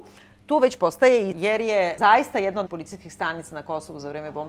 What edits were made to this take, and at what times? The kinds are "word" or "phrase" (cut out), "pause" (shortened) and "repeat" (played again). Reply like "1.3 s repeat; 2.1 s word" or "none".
1.3 s word; 2.0 s word; 2.7 s word